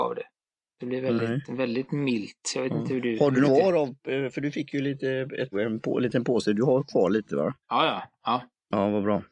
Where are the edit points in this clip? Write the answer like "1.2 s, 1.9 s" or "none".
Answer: 3.4 s, 5.5 s, 7.6 s